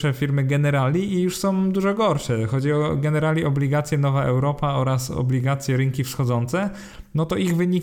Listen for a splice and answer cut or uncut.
uncut